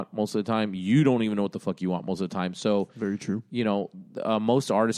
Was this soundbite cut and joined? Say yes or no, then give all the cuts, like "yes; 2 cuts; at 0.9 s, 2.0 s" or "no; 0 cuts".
no; 0 cuts